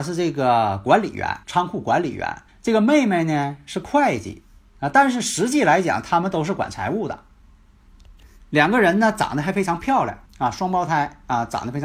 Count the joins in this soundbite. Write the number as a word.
three